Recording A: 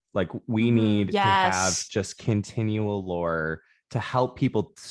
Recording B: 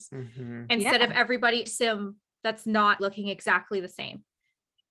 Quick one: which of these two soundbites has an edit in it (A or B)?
B